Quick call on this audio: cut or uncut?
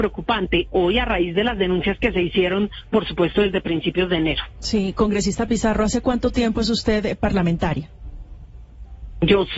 uncut